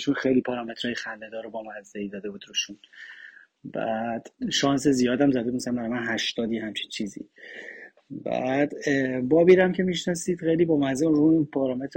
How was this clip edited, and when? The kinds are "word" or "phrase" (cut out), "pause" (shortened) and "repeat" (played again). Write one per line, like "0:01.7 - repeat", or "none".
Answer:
0:04.4 - pause